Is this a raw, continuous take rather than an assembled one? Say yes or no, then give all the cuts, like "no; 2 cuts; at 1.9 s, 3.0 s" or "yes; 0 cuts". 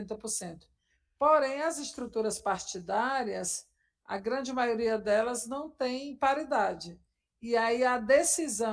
yes; 0 cuts